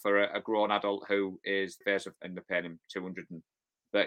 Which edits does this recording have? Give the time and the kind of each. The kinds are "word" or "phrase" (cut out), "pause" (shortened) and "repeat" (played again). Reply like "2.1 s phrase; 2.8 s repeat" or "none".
1.8 s word; 2.2 s word